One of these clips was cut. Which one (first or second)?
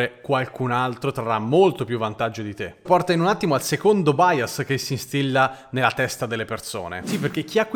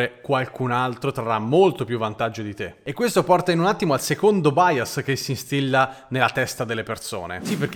first